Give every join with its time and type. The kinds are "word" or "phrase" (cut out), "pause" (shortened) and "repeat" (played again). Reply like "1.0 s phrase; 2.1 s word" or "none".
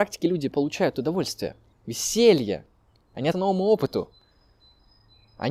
1.7 s word; 3.3 s word